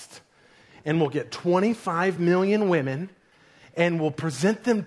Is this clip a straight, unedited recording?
yes; 0 cuts

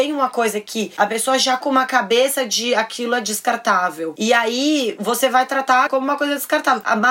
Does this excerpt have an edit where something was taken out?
yes; 2 cuts; at 1.6 s, 5.9 s

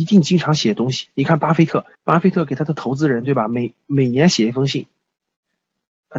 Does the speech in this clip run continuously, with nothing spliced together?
no; 1 cut; at 1.9 s

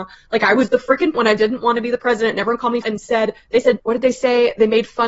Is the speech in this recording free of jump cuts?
no; 3 cuts; at 1.1 s, 2.8 s, 3.8 s

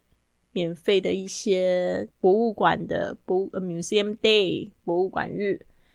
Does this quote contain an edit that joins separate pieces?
yes; 1 cut; at 2.1 s

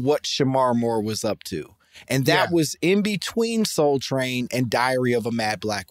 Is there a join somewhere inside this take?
no; 0 cuts

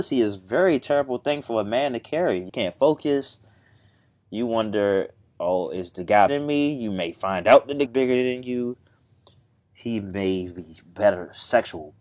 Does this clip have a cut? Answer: yes; 3 cuts; at 2.5 s, 6.3 s, 7.9 s

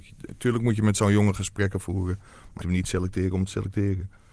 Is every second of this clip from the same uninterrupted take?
no; 1 cut; at 2.6 s

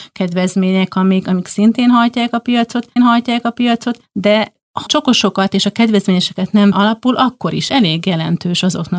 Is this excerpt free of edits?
no; 4 cuts; at 3.0 s, 4.9 s, 6.7 s, 7.7 s

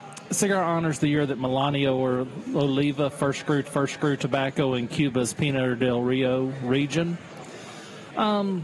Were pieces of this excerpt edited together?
yes; 1 cut; at 3.6 s

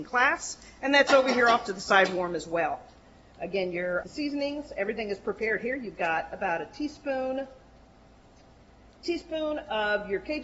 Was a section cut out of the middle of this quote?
no; 0 cuts

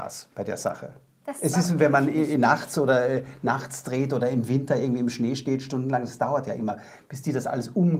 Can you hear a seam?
no; 0 cuts

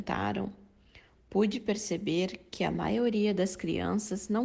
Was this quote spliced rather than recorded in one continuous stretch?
no; 0 cuts

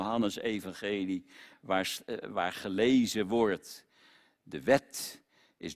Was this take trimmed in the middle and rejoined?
no; 0 cuts

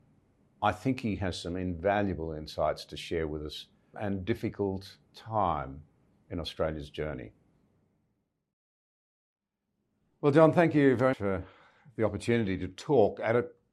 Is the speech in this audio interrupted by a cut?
yes; 3 cuts; at 3.9 s, 5.1 s, 11.1 s

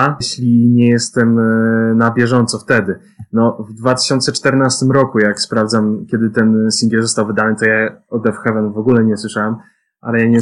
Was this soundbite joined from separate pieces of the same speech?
no; 0 cuts

